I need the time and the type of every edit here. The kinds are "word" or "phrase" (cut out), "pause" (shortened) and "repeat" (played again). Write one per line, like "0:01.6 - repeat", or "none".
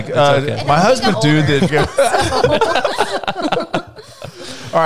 0:01.1 - phrase
0:01.7 - word